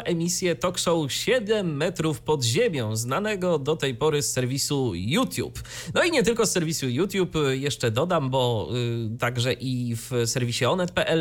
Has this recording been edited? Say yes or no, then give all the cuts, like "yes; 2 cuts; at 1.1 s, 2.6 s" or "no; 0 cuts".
no; 0 cuts